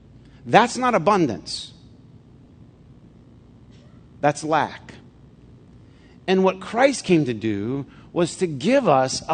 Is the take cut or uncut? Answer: uncut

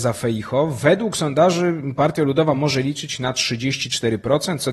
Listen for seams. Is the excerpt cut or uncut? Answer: uncut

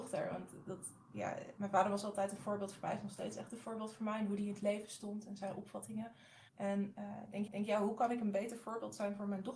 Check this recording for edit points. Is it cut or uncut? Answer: cut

